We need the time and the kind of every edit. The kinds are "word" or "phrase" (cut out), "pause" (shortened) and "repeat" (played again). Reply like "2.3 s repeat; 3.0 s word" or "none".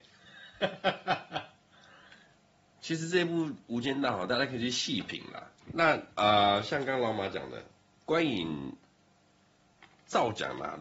5.6 s pause